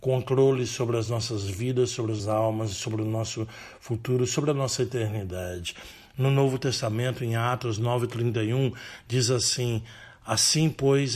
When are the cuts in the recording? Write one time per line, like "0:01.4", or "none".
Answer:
0:02.2